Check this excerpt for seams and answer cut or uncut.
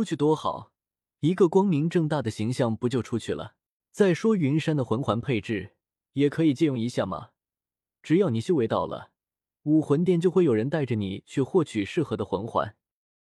cut